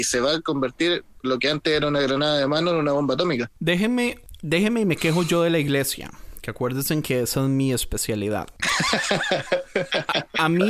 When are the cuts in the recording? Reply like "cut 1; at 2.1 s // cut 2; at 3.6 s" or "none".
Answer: cut 1; at 1.2 s